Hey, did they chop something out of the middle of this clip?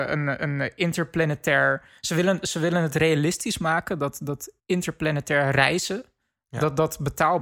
yes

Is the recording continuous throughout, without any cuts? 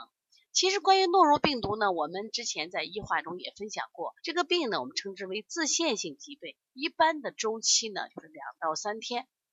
no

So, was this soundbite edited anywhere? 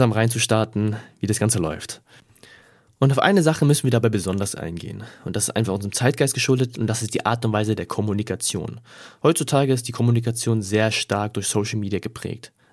no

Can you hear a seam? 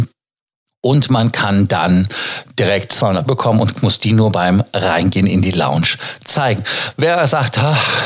yes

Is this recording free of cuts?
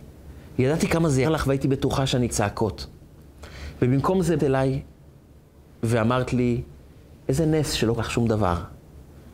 no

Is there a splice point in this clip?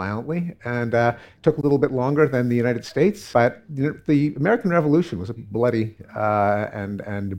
yes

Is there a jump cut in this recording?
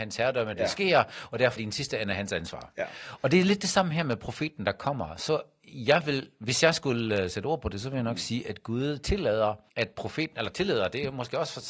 yes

